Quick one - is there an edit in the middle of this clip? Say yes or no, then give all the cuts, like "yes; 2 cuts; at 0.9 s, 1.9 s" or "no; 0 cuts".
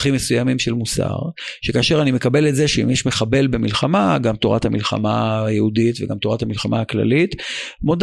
no; 0 cuts